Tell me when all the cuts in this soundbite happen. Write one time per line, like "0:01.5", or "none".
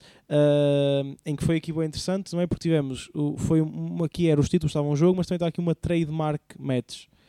none